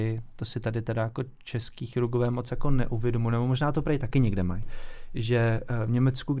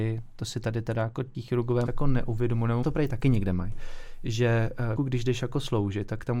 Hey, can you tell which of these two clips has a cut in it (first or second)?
second